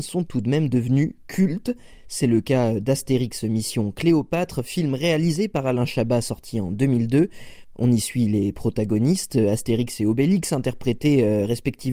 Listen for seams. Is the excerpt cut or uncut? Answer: uncut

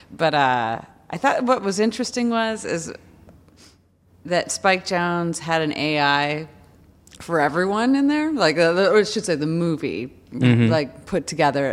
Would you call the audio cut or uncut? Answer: uncut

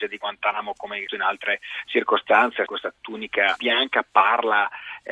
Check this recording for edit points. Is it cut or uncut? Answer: cut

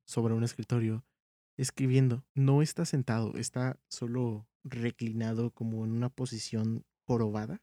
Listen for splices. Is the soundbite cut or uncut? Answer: cut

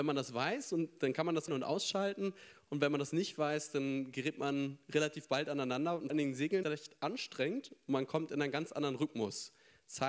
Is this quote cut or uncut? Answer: cut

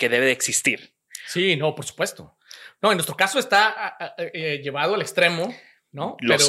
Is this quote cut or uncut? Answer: uncut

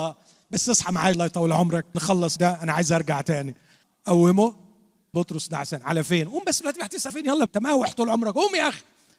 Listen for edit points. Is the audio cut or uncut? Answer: cut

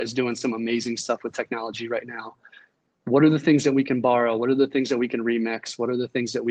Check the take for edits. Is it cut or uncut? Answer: uncut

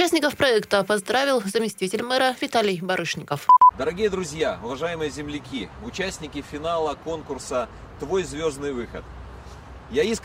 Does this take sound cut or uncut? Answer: uncut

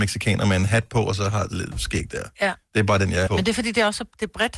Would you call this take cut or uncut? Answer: cut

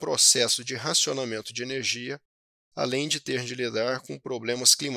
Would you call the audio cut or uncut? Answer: uncut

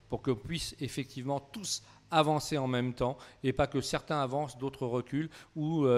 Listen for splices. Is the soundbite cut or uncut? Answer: uncut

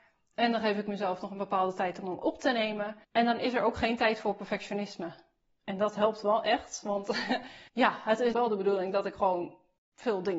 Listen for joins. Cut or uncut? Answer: cut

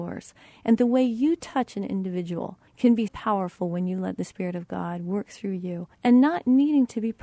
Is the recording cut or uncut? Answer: cut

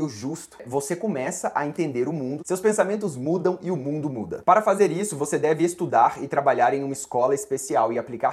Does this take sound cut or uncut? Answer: uncut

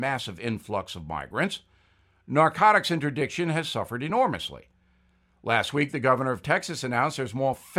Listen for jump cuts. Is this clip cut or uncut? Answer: uncut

